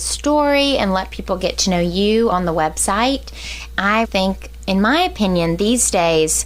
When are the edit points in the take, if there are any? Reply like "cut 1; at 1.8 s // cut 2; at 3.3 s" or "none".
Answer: cut 1; at 2.3 s // cut 2; at 4.0 s